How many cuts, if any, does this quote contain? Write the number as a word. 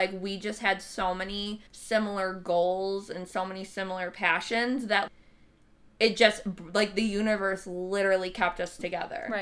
one